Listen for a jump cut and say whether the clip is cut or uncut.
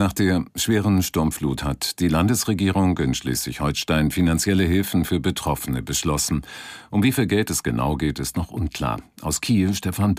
uncut